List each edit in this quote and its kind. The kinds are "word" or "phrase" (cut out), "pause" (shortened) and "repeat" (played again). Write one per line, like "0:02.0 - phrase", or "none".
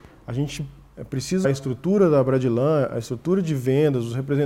0:01.4 - word